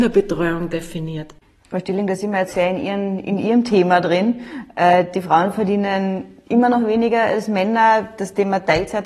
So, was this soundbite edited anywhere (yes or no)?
yes